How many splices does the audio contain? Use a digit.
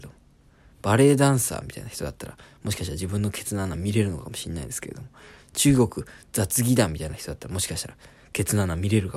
0